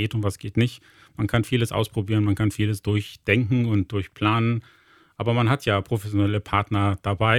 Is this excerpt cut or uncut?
uncut